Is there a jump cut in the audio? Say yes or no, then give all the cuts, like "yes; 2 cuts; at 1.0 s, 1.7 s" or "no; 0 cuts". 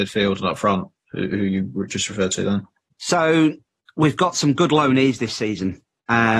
no; 0 cuts